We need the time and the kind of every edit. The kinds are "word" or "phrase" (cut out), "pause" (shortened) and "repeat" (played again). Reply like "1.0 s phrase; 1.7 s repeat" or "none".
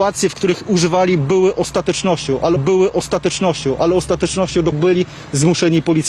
2.6 s repeat; 4.7 s word